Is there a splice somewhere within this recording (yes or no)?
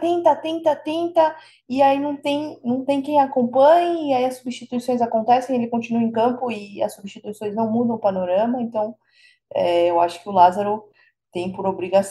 no